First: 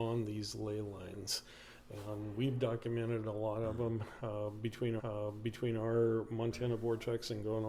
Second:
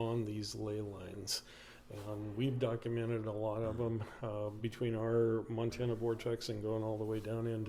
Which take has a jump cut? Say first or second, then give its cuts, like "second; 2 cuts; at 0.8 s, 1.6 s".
first; 1 cut; at 5.0 s